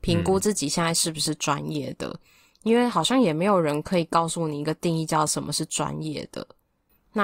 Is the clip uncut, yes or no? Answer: yes